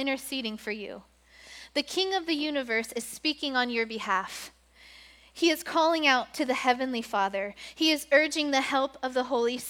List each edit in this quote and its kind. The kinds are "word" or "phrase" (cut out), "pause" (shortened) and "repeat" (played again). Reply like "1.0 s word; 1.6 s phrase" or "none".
none